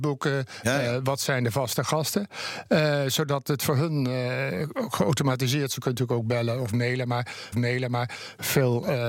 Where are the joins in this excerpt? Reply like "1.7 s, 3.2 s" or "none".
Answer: 7.5 s